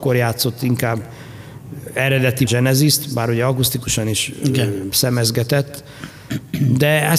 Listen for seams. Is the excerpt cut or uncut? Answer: cut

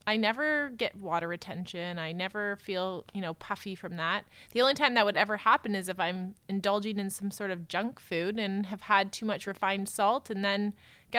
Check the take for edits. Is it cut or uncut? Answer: uncut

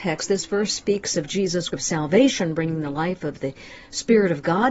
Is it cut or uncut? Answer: cut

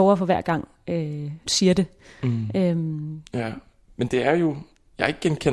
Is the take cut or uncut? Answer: cut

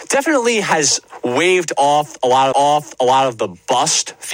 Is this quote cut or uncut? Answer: cut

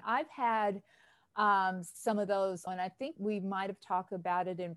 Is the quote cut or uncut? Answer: cut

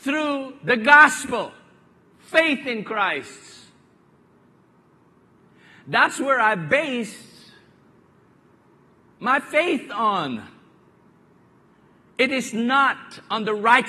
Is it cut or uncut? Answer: uncut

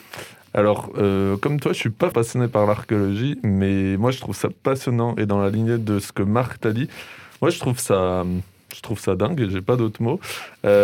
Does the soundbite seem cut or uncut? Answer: cut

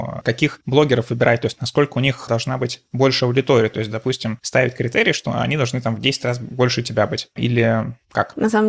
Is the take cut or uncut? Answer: uncut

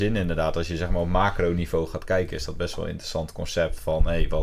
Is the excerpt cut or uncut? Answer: uncut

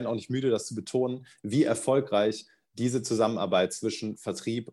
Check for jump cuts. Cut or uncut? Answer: uncut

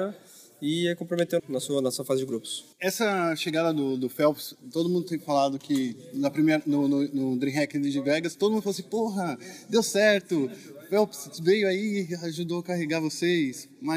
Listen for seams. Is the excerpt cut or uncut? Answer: cut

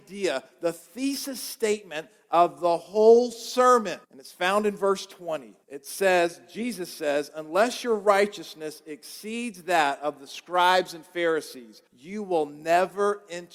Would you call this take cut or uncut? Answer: cut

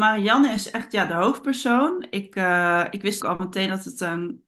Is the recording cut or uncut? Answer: cut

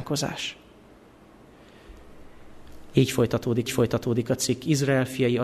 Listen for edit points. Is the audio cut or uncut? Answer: cut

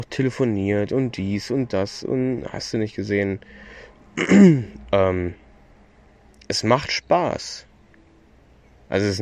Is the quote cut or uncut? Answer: cut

